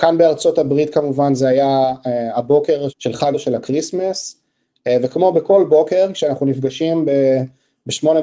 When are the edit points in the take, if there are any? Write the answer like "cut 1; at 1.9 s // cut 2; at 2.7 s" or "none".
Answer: cut 1; at 2.9 s // cut 2; at 3.3 s